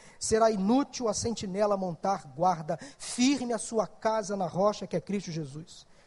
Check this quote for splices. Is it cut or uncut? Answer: uncut